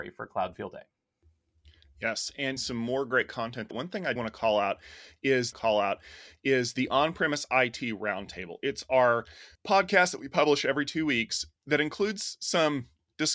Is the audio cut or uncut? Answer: cut